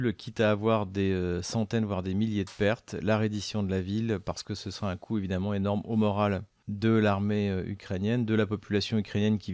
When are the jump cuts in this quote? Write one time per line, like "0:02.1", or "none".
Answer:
none